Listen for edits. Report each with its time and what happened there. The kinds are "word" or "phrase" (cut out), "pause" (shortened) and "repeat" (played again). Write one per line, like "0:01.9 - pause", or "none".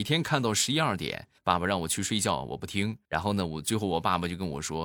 0:01.4 - pause
0:03.0 - pause